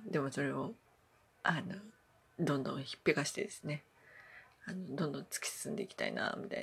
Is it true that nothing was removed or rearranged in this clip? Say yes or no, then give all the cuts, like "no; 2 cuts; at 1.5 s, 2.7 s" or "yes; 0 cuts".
no; 1 cut; at 1.0 s